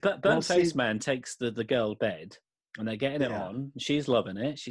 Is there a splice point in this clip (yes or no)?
yes